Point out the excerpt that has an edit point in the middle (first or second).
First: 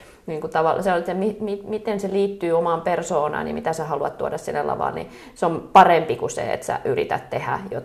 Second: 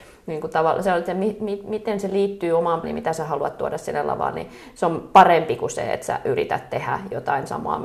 second